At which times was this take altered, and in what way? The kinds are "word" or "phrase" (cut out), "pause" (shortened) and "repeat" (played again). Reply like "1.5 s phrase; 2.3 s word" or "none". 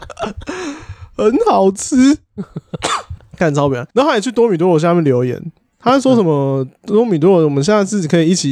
3.9 s pause